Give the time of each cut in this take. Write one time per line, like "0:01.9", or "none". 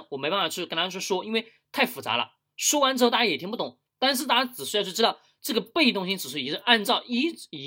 none

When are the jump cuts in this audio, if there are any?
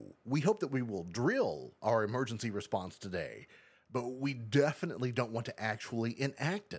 none

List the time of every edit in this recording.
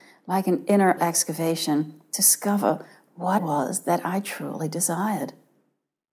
0:01.0
0:03.4

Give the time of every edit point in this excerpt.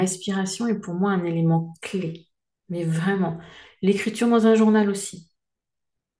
none

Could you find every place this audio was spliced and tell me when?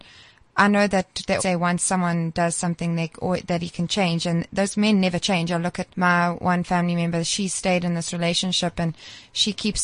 0:01.4
0:05.9

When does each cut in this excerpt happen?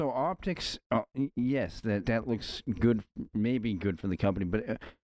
0:02.0

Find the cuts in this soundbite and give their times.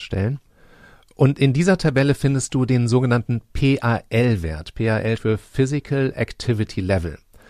0:05.2

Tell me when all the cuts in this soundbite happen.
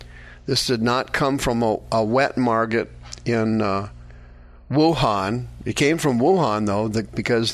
none

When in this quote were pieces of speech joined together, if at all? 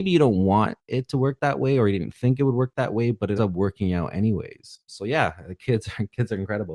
0:03.4
0:04.9

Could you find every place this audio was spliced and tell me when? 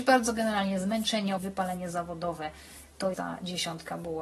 0:01.4
0:03.1

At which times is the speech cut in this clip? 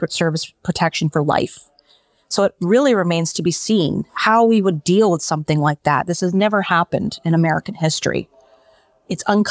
0:04.1

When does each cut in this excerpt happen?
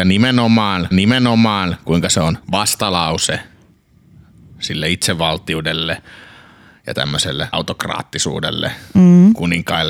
0:00.9
0:02.4
0:07.5

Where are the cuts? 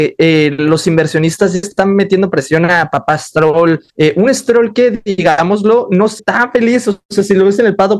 0:01.6
0:03.9
0:06.2

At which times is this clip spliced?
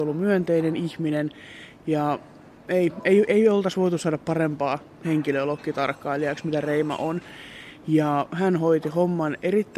none

